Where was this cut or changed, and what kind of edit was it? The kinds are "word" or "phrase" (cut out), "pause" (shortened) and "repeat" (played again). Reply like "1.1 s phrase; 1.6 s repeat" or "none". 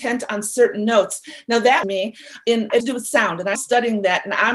1.8 s phrase; 2.8 s word; 3.6 s word